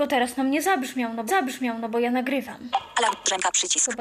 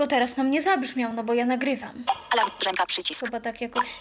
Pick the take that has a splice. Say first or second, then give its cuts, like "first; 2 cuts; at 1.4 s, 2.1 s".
first; 1 cut; at 1.3 s